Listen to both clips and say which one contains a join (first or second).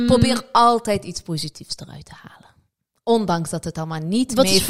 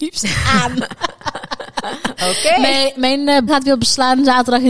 second